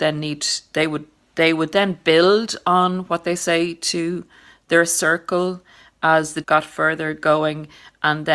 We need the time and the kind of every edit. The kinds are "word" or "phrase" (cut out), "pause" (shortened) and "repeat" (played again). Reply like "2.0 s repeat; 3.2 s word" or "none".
6.4 s word

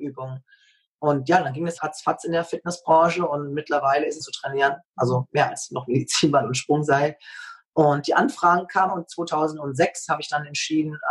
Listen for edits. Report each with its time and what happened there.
1.8 s word; 4.2 s phrase; 8.9 s phrase

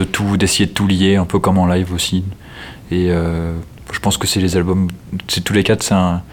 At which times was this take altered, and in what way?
none

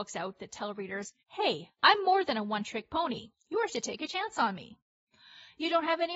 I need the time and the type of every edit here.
1.2 s pause; 3.7 s word

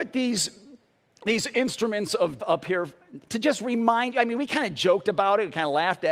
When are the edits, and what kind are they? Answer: 2.4 s word; 3.2 s word

